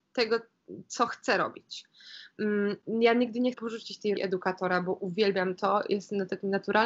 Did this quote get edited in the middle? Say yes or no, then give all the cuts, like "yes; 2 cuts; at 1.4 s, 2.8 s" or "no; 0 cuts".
yes; 2 cuts; at 3.5 s, 4.1 s